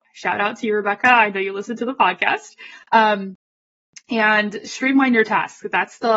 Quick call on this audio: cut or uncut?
uncut